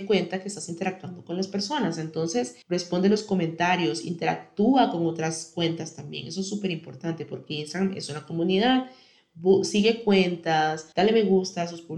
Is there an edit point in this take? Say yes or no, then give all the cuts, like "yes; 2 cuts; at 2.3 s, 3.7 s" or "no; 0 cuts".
yes; 2 cuts; at 2.6 s, 10.9 s